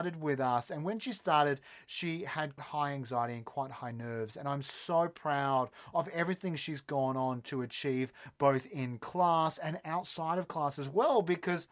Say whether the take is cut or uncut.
cut